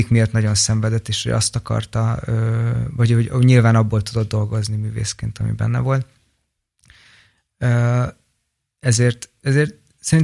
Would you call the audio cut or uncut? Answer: uncut